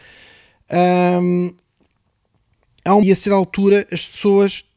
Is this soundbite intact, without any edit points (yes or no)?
no